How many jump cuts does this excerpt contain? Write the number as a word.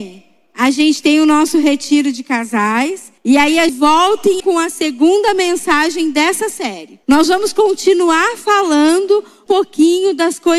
five